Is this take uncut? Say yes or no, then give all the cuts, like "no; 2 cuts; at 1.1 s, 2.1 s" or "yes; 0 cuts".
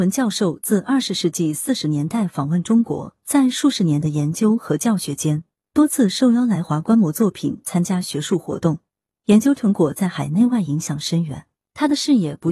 yes; 0 cuts